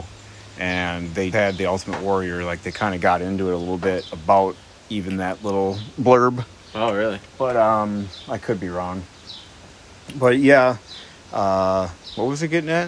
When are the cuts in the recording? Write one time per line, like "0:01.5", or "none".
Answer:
0:01.3
0:04.7